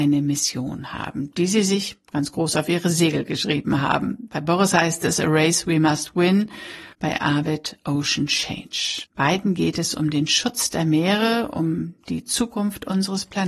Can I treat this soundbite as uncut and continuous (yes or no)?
no